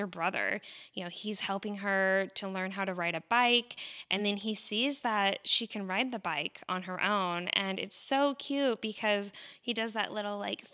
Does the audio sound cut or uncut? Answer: uncut